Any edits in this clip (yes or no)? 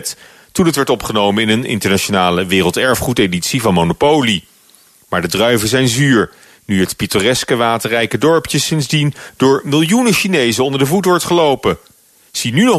no